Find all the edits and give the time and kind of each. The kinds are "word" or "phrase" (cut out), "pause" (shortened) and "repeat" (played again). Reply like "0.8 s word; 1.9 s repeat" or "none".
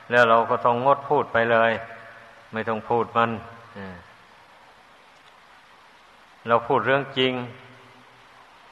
none